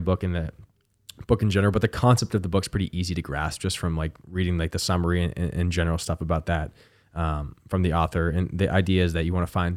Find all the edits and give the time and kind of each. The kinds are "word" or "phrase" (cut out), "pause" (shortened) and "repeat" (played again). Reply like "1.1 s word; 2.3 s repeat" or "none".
none